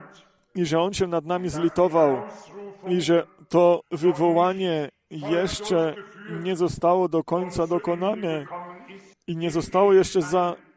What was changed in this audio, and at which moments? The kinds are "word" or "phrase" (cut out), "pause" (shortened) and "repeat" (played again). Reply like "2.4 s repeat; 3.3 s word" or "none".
9.1 s pause